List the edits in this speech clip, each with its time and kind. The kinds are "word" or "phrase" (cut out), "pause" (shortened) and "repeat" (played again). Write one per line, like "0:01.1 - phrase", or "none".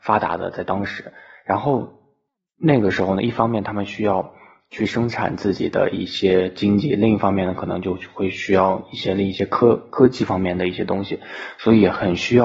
none